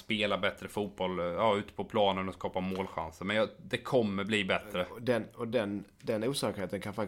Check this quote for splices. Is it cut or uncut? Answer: uncut